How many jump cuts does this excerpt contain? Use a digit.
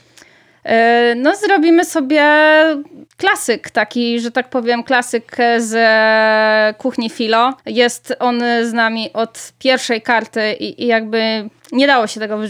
3